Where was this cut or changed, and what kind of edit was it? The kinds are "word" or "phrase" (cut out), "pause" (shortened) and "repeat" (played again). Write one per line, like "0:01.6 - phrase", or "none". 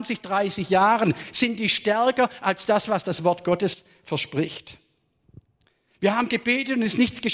none